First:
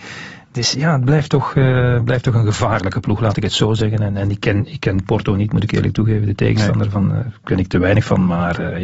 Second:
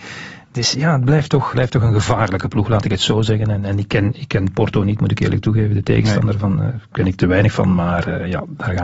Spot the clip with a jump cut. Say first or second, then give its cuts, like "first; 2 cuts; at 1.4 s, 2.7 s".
second; 1 cut; at 1.5 s